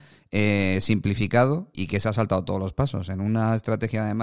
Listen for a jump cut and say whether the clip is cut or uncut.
cut